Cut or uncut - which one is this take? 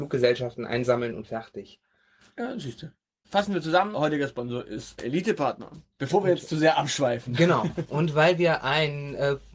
cut